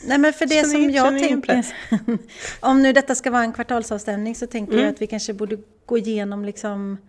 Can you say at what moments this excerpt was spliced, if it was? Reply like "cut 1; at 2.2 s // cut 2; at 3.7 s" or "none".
none